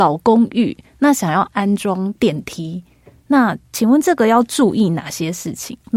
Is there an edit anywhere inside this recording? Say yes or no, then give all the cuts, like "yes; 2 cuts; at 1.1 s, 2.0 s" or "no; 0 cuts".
no; 0 cuts